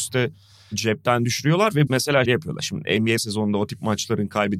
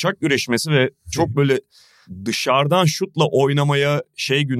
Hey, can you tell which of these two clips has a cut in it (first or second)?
first